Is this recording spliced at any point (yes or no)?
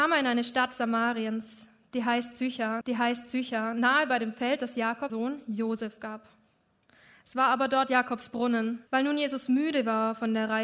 yes